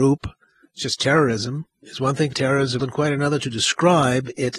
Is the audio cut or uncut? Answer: cut